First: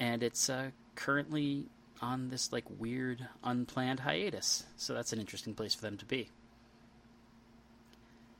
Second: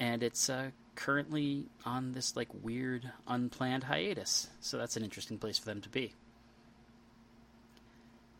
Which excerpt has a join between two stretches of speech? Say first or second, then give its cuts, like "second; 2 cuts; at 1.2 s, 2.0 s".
second; 1 cut; at 1.7 s